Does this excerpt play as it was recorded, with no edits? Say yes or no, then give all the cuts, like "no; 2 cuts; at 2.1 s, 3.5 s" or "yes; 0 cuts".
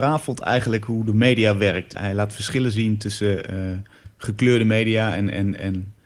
no; 1 cut; at 1.9 s